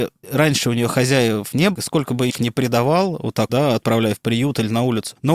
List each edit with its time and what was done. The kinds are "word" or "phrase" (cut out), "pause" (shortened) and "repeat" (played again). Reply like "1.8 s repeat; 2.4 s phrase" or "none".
1.7 s word; 2.3 s word; 3.5 s word

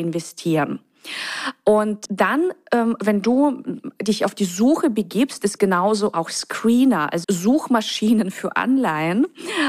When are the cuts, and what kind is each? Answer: 5.6 s word; 7.2 s word

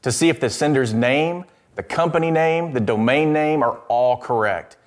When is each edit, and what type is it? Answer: none

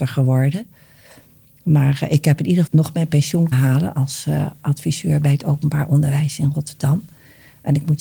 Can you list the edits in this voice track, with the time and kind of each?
2.7 s word; 3.5 s word

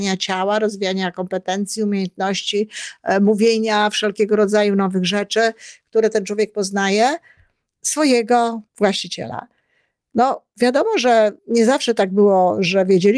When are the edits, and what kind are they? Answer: 8.7 s pause; 11.4 s pause

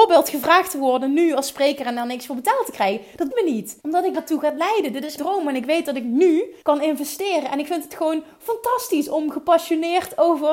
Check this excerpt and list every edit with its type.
3.3 s word; 3.8 s pause; 4.1 s phrase; 5.2 s word; 6.6 s pause

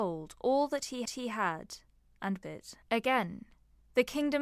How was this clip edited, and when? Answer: 1.1 s repeat; 2.4 s word; 2.8 s pause

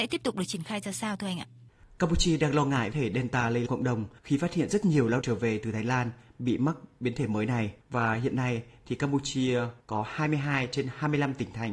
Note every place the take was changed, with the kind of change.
2.9 s phrase; 3.7 s phrase; 4.2 s pause; 5.2 s word; 7.8 s pause; 9.8 s pause

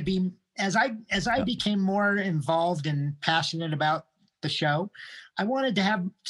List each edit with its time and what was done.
none

